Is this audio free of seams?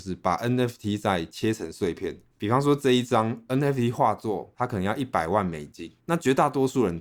yes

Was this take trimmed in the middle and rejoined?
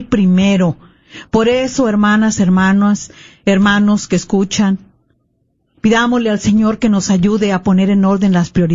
no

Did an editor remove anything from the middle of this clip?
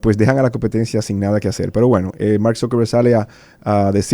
no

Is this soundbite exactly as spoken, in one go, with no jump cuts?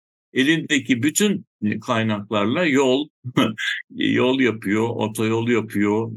yes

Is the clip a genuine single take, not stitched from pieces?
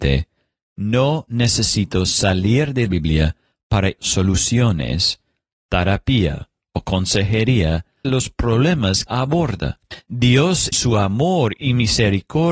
no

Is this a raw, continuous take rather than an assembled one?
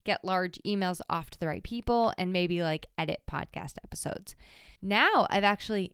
no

